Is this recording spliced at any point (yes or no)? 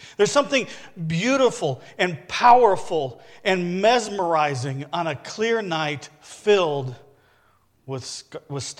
no